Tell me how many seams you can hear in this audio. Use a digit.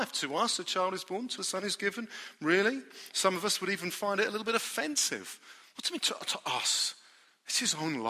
1